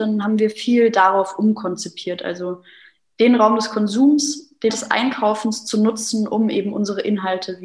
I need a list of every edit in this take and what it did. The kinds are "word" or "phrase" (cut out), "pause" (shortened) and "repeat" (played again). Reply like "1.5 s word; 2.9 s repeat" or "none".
4.7 s word